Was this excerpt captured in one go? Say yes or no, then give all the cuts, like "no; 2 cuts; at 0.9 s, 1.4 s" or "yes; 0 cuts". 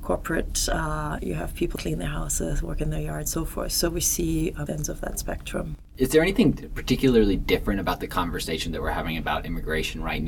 no; 4 cuts; at 1.2 s, 1.8 s, 3.3 s, 4.7 s